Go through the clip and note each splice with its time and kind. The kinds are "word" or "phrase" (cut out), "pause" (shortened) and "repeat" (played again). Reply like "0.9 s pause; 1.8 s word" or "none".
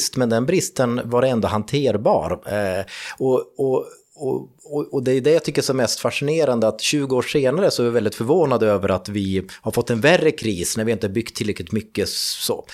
none